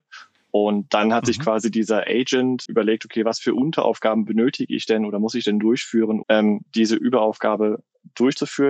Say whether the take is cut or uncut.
cut